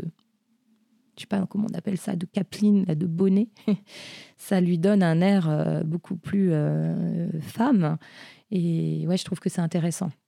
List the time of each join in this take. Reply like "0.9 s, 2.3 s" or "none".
none